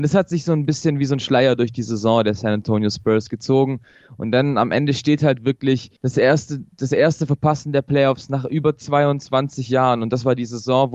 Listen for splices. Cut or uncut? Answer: cut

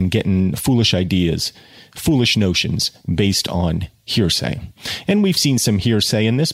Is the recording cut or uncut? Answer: uncut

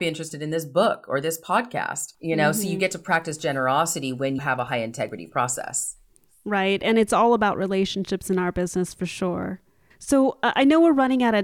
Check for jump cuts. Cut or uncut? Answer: cut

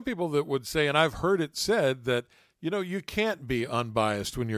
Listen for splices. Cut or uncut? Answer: uncut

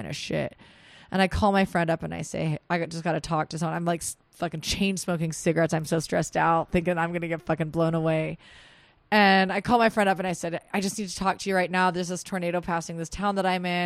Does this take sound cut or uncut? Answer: uncut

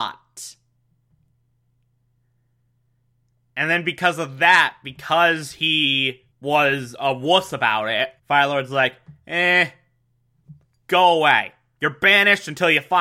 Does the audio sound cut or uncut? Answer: cut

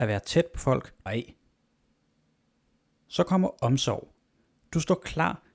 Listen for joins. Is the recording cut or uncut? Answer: cut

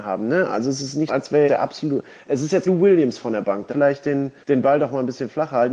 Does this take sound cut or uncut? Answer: cut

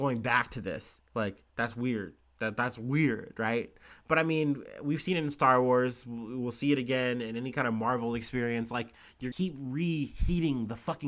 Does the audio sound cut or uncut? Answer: cut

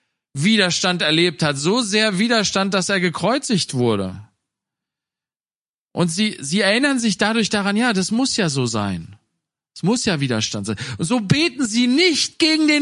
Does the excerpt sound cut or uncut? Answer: uncut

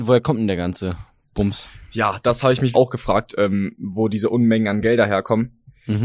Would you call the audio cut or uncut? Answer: cut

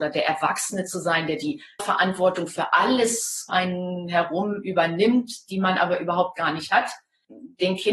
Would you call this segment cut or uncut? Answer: cut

